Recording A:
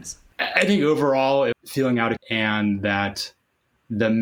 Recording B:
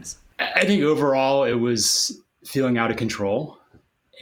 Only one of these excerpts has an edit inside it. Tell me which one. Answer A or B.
A